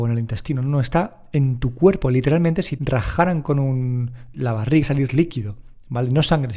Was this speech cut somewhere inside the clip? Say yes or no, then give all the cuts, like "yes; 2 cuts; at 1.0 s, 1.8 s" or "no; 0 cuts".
yes; 3 cuts; at 2.8 s, 4.3 s, 4.8 s